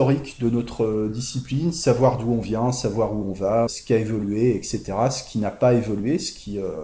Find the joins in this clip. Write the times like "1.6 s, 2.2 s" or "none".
3.7 s